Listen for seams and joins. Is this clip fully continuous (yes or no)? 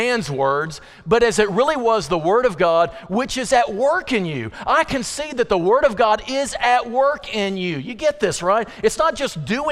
yes